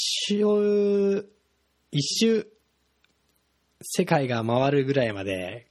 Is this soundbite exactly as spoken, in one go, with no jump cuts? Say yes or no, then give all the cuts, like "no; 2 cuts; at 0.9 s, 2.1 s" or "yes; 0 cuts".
yes; 0 cuts